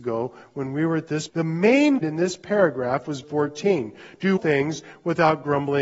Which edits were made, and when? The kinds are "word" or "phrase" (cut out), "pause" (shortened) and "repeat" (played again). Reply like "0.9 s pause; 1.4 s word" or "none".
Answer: 1.3 s word; 2.0 s word; 3.2 s word; 4.4 s word